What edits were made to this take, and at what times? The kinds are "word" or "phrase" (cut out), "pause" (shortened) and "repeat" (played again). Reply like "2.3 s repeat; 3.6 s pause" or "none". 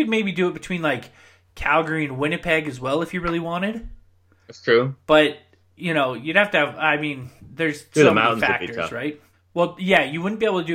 9.3 s pause

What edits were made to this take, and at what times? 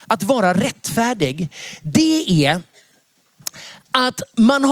none

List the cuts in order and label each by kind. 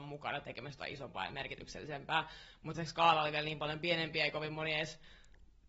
2.7 s word

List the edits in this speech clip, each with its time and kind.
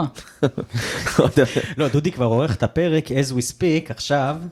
none

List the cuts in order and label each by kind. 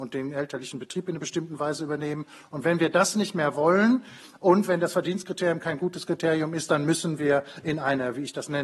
none

